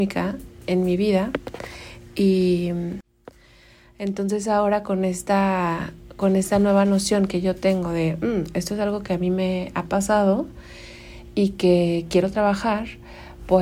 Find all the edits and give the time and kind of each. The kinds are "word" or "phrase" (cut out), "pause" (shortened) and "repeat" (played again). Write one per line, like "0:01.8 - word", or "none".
none